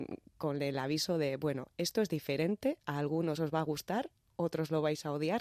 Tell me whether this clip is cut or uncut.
uncut